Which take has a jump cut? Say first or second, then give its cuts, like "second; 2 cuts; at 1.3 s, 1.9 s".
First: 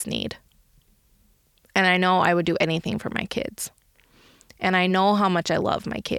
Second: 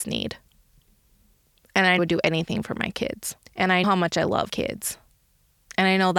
second; 4 cuts; at 2.0 s, 3.4 s, 3.8 s, 4.5 s